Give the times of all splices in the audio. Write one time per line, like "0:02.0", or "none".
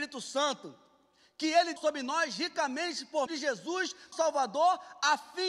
0:01.8
0:03.3
0:04.1